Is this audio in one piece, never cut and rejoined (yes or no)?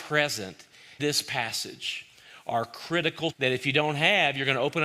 no